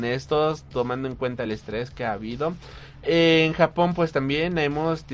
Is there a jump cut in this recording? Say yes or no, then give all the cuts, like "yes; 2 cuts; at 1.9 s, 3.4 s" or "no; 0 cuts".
no; 0 cuts